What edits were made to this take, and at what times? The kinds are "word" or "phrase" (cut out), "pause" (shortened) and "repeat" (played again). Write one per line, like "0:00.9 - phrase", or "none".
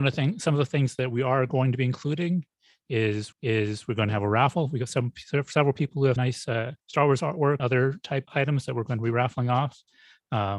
0:03.3 - repeat
0:06.2 - word
0:06.8 - pause
0:07.6 - word
0:08.3 - word